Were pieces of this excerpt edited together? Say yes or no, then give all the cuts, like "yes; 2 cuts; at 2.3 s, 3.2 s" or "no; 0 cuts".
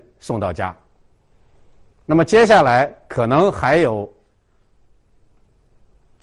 no; 0 cuts